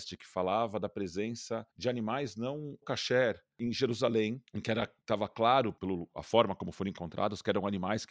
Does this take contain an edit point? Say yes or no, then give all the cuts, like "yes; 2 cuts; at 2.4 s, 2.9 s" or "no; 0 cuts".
yes; 3 cuts; at 1.7 s, 2.8 s, 4.5 s